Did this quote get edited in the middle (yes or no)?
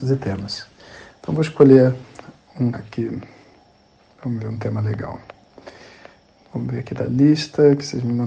yes